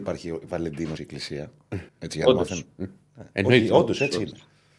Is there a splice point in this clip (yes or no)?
yes